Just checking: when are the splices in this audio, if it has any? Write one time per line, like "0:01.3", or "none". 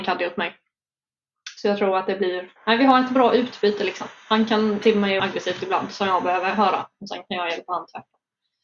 0:02.6
0:04.8
0:05.2